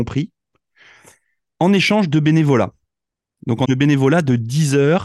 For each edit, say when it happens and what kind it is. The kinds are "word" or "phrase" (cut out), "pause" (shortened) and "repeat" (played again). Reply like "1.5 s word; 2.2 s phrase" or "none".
3.6 s word